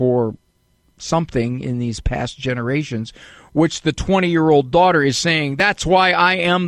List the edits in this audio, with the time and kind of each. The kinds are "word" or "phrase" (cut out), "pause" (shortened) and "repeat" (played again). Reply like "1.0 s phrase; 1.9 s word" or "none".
none

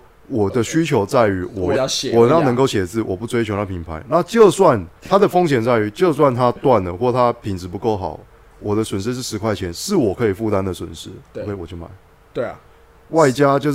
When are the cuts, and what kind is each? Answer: 1.7 s word; 5.0 s pause

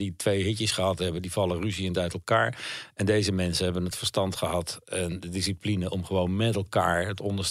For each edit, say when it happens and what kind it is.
none

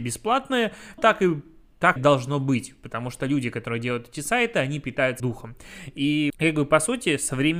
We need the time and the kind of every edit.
1.0 s word; 2.0 s word; 5.2 s word; 6.3 s word

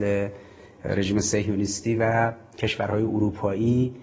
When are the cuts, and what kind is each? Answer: none

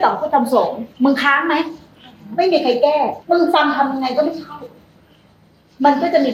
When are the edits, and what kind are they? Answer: 0.9 s pause; 3.2 s pause

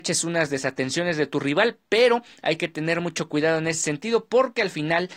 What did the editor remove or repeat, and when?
none

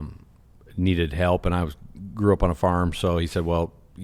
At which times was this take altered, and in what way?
none

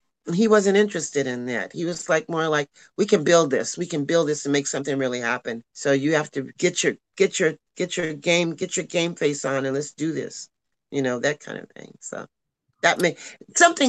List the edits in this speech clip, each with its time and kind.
5.7 s pause; 6.5 s pause

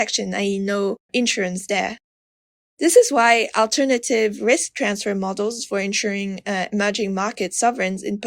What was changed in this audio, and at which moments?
1.1 s word

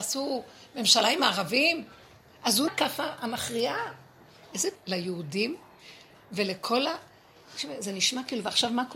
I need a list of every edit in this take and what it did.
2.7 s word; 4.7 s word

